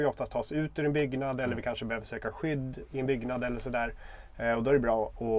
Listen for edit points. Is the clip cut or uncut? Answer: uncut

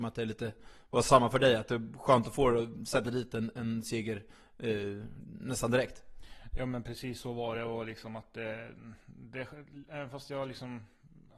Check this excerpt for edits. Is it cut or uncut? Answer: uncut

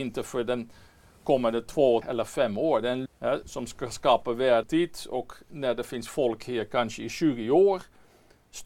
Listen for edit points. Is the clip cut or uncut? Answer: cut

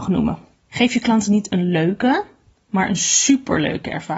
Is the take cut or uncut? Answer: uncut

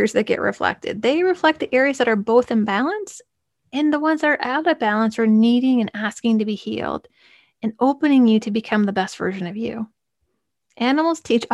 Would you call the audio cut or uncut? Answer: uncut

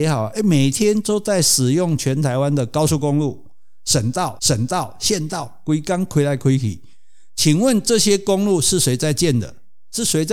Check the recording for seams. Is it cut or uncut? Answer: cut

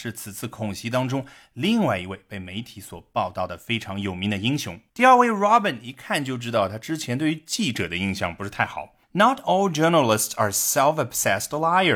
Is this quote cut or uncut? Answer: cut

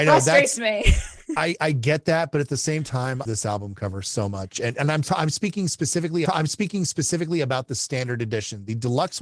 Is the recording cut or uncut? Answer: cut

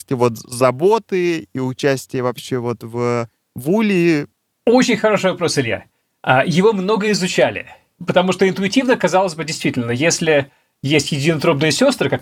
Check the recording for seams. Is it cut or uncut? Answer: uncut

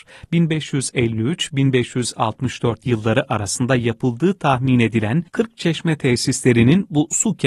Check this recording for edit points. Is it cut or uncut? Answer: cut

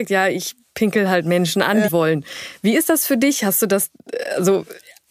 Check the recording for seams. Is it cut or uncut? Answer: cut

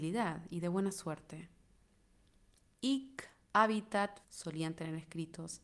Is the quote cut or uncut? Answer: cut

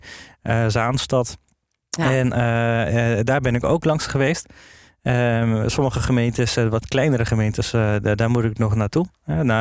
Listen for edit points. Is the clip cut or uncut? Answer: uncut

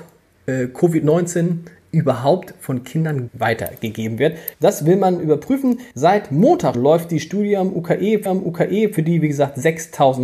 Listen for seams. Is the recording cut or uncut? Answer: cut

